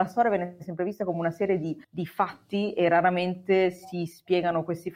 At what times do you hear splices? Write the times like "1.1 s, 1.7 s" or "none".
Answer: 1.8 s